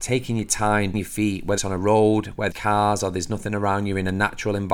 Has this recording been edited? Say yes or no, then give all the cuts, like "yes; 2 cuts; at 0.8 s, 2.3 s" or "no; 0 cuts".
yes; 3 cuts; at 0.9 s, 1.6 s, 2.5 s